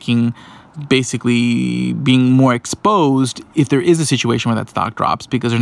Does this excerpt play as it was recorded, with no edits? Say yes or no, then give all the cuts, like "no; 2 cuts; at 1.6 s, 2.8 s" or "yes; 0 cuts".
yes; 0 cuts